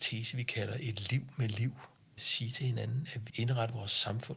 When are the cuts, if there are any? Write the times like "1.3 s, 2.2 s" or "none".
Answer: 2.2 s, 3.3 s